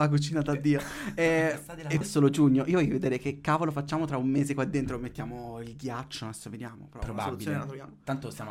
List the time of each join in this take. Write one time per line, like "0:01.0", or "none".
0:02.0